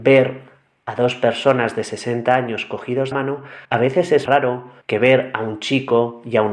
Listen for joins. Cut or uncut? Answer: cut